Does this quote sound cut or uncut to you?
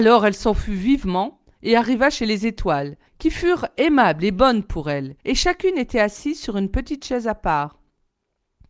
cut